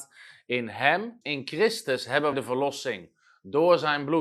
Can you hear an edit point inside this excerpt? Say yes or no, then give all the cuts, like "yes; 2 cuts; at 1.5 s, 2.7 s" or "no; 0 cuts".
yes; 2 cuts; at 1.2 s, 2.3 s